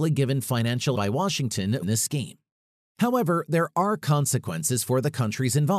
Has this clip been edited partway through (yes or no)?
yes